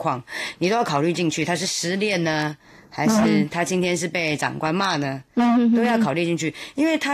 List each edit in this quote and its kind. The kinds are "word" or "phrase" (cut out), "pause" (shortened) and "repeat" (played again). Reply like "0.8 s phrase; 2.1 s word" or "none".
none